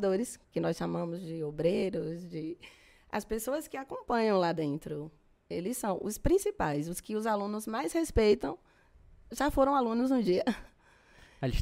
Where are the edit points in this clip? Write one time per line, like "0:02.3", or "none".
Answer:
none